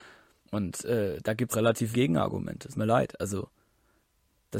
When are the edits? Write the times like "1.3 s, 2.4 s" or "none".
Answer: 1.5 s, 1.9 s, 2.7 s